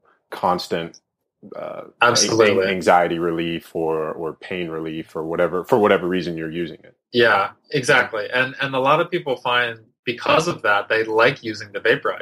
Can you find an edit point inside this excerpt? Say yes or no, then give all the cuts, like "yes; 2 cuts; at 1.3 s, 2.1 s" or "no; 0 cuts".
yes; 2 cuts; at 7.0 s, 9.9 s